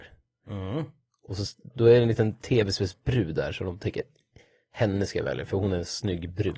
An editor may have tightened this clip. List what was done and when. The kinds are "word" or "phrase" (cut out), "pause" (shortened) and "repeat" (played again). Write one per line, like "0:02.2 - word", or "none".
none